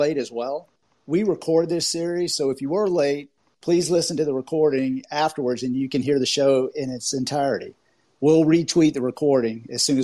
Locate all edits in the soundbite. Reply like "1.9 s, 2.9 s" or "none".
none